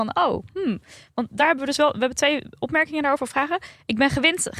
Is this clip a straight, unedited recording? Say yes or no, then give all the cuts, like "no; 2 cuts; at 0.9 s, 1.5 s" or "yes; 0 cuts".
yes; 0 cuts